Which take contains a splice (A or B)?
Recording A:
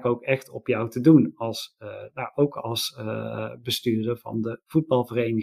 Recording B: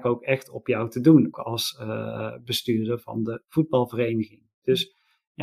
B